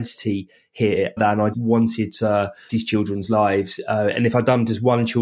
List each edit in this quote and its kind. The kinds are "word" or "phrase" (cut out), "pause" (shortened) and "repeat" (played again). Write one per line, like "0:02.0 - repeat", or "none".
0:01.2 - word
0:01.5 - word
0:02.7 - word